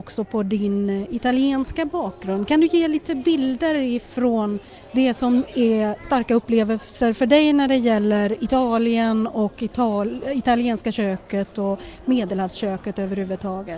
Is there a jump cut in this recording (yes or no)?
no